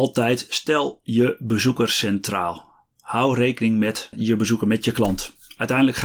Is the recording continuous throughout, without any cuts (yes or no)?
yes